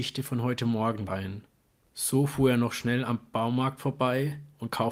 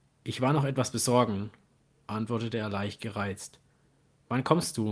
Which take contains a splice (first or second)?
first